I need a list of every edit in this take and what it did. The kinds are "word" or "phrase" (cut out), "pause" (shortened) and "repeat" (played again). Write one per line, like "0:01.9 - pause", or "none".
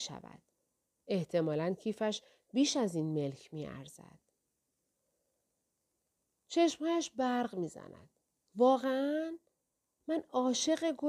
none

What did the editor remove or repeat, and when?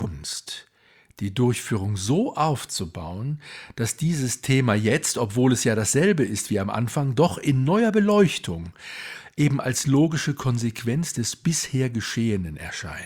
none

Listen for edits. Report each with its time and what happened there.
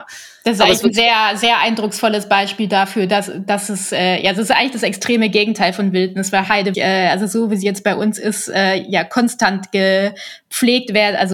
0:06.7 - word

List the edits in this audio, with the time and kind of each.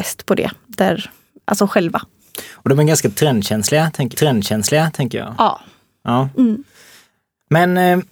0:04.1 - repeat

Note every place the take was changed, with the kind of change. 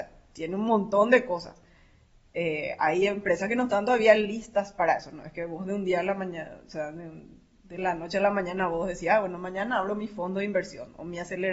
none

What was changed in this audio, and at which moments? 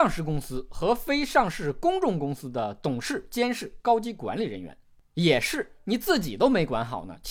none

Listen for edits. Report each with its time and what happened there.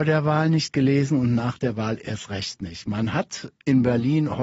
none

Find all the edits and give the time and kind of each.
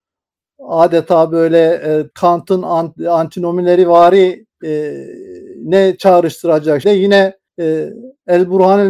0:02.1 - pause
0:04.5 - pause
0:06.8 - word
0:07.5 - pause

